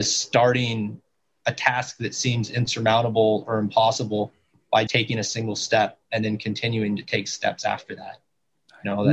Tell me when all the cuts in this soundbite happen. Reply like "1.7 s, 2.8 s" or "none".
4.9 s